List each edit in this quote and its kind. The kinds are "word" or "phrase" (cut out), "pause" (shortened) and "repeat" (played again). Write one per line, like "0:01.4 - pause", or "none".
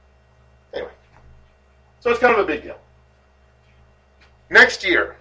none

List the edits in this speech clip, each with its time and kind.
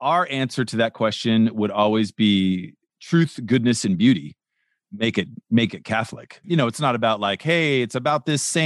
none

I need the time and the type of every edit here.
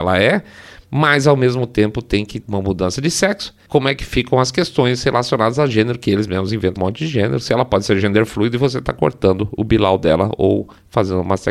0:02.4 - word
0:03.7 - word
0:06.8 - word

